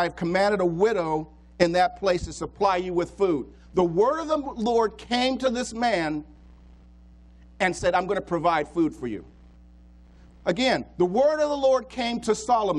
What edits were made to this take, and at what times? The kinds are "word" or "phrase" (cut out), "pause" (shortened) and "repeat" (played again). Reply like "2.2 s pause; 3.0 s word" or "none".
none